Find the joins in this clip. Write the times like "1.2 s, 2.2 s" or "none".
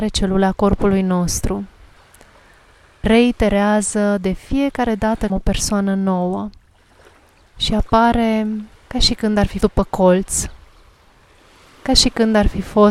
3.0 s, 5.3 s, 8.8 s, 9.6 s